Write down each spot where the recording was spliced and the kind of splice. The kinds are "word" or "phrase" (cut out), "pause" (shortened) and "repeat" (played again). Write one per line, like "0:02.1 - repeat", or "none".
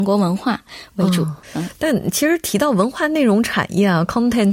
0:01.4 - pause